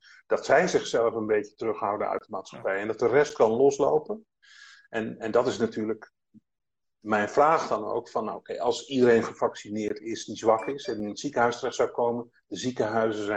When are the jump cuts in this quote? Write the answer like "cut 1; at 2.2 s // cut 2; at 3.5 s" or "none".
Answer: none